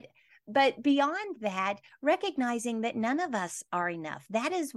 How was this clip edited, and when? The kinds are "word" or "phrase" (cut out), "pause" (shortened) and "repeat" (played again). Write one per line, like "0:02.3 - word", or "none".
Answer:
none